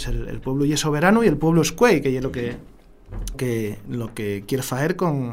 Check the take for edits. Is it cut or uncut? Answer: cut